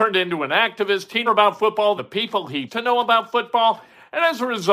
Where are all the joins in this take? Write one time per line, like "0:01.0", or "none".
0:01.3
0:02.0
0:02.7

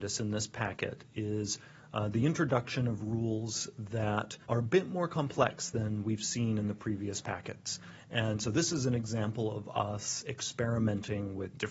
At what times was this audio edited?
0:04.4

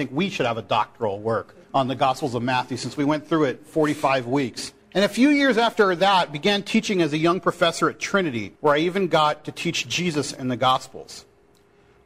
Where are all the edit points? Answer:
0:01.6
0:04.8
0:08.6

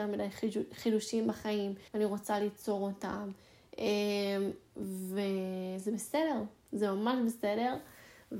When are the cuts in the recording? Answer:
0:01.9

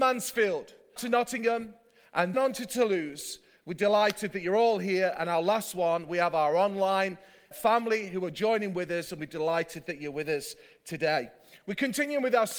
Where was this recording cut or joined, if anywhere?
0:01.0
0:02.3
0:07.5

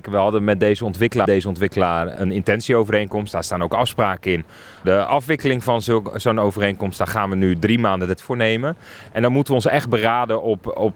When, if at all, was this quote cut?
0:01.2
0:04.8
0:08.2

